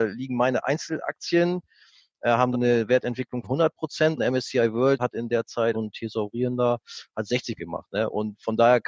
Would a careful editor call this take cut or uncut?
cut